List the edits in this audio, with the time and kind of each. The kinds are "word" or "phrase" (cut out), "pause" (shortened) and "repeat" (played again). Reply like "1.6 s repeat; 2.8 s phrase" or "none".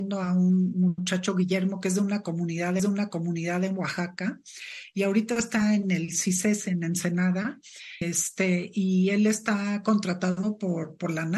2.8 s repeat; 8.0 s word